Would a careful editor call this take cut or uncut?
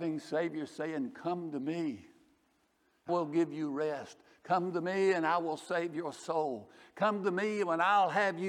cut